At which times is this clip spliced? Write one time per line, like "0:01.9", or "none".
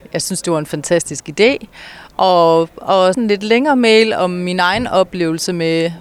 0:03.1